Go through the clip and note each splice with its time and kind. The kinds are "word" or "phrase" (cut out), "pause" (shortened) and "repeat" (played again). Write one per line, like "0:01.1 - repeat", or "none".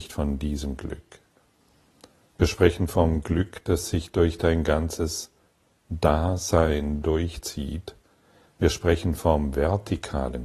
none